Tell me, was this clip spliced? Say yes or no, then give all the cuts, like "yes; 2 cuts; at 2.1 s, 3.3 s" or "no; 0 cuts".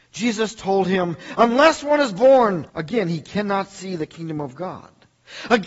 yes; 1 cut; at 2.7 s